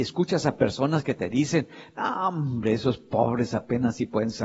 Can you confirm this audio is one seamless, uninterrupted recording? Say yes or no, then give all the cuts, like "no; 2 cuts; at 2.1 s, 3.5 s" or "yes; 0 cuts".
yes; 0 cuts